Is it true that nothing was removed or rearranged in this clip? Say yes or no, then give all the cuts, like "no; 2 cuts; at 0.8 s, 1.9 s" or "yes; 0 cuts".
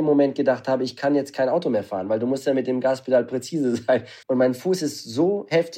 no; 1 cut; at 4.2 s